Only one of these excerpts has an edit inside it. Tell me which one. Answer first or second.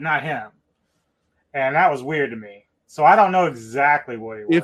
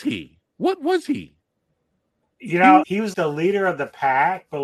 second